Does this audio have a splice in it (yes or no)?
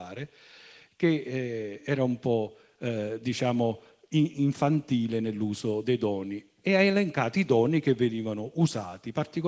no